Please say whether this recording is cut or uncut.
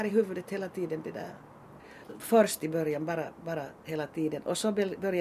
uncut